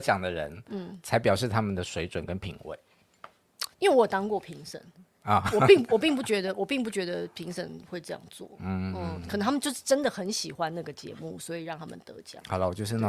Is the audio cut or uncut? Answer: cut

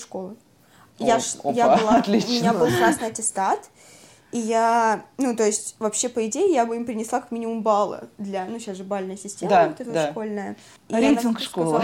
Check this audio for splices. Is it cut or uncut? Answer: uncut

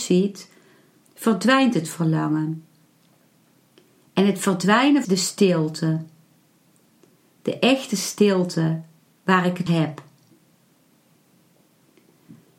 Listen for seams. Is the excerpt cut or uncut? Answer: cut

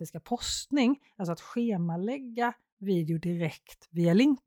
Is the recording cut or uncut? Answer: uncut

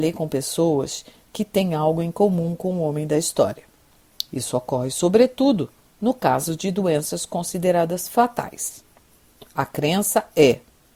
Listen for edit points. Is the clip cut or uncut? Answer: uncut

